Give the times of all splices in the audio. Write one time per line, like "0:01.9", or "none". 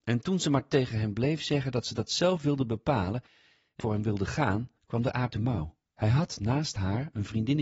0:03.8
0:04.8
0:05.3
0:05.9